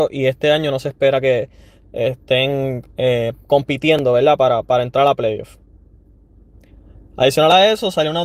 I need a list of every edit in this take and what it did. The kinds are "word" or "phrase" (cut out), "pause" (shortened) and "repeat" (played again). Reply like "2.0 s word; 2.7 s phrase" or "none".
none